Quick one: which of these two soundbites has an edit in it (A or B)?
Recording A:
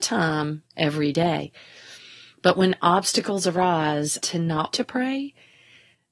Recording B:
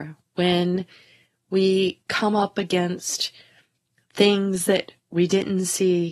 A